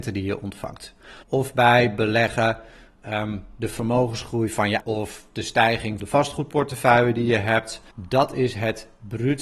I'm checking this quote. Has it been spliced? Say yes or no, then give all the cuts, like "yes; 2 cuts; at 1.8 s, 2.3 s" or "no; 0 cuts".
yes; 4 cuts; at 1.2 s, 4.8 s, 6.0 s, 7.9 s